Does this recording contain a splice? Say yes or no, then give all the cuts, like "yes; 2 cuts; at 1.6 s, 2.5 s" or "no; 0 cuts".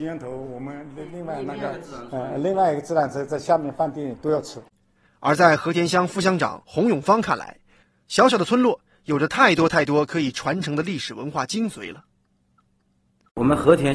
no; 0 cuts